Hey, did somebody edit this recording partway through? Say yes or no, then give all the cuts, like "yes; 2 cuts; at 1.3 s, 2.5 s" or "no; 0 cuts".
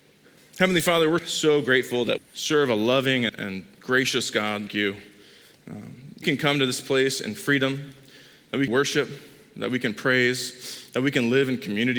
yes; 6 cuts; at 1.2 s, 2.2 s, 3.3 s, 4.7 s, 6.2 s, 8.7 s